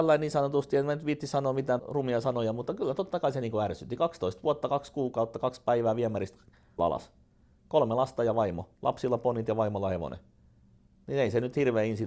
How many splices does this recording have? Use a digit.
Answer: 3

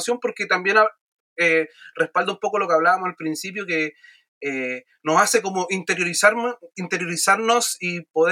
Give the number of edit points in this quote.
0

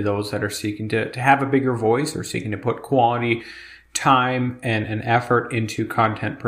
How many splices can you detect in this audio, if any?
0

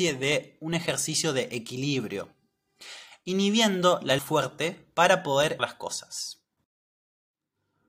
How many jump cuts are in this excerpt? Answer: 2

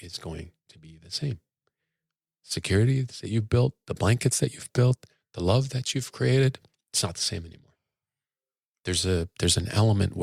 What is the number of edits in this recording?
0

